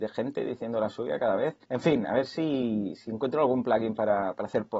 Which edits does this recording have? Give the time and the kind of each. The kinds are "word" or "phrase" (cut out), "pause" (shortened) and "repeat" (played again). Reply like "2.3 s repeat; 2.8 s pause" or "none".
1.6 s pause